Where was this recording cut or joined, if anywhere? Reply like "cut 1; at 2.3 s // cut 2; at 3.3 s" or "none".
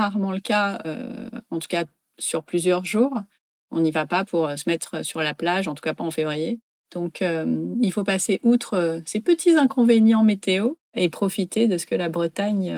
none

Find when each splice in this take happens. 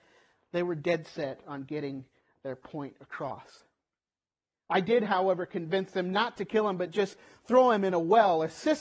none

